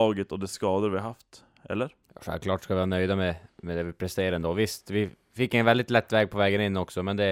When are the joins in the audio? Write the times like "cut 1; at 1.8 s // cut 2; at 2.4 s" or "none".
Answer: cut 1; at 2.0 s